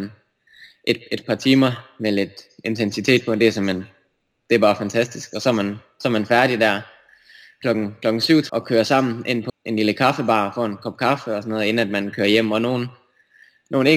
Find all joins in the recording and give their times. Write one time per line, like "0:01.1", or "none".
0:08.5
0:09.5

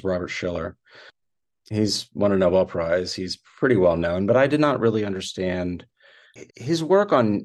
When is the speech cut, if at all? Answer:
0:06.5

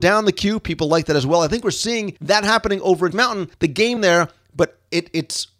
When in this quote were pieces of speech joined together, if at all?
0:02.2
0:03.1
0:03.5
0:04.0

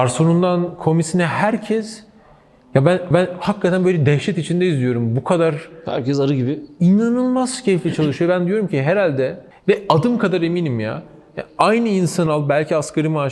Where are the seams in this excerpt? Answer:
0:03.1
0:09.5
0:12.3

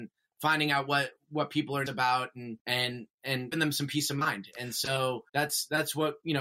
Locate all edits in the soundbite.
0:01.9
0:02.6
0:03.5
0:05.3

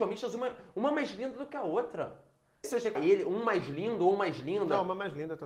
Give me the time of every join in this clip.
0:02.6
0:02.9

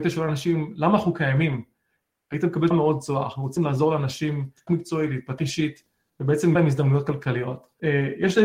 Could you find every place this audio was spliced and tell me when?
0:02.7
0:03.6
0:04.7
0:05.4
0:06.5

